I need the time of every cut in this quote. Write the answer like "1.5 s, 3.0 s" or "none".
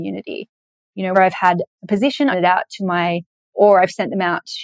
1.1 s, 2.3 s, 3.4 s